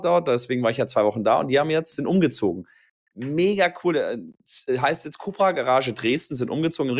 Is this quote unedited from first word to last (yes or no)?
yes